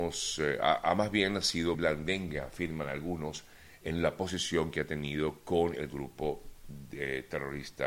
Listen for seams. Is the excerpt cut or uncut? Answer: cut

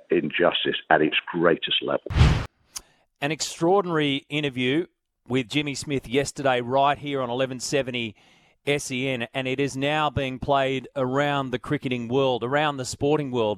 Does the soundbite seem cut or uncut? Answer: uncut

